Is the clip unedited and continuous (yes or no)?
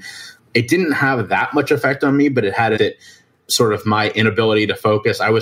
no